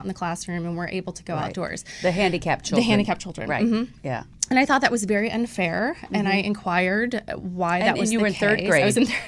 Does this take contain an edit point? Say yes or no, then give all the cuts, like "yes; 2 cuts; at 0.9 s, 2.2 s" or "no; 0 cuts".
no; 0 cuts